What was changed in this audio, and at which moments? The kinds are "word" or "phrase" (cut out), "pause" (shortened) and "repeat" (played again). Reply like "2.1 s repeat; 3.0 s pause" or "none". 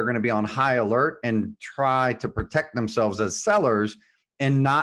none